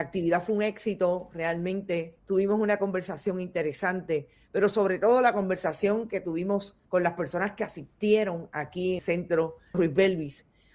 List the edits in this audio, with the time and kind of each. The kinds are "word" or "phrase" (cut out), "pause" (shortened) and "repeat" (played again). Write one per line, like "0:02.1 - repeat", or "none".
0:02.2 - pause
0:06.8 - word
0:09.0 - word
0:09.7 - word